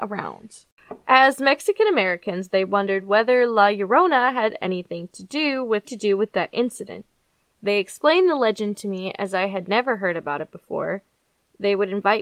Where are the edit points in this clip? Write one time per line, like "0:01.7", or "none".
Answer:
0:05.8